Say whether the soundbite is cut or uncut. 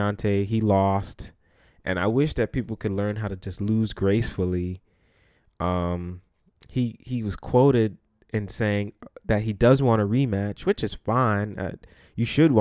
uncut